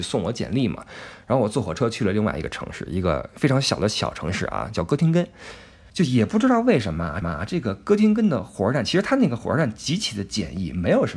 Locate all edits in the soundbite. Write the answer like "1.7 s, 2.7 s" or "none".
7.2 s